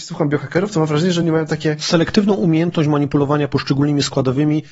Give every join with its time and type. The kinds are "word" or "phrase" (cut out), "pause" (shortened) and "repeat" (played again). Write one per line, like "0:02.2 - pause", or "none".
none